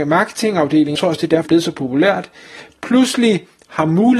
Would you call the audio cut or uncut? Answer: cut